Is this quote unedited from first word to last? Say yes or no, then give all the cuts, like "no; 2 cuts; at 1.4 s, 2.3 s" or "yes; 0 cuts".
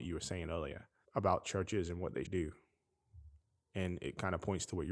no; 2 cuts; at 1.0 s, 2.2 s